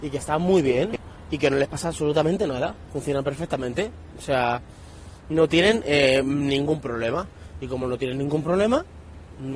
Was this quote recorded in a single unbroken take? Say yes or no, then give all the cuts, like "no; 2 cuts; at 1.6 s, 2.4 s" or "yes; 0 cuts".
yes; 0 cuts